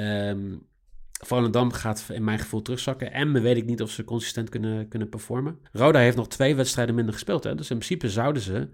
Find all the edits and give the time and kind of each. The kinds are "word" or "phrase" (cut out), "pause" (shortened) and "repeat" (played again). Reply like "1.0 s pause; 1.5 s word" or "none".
5.7 s pause